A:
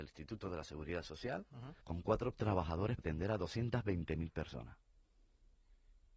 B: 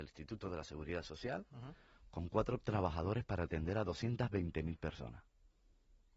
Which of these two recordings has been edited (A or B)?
A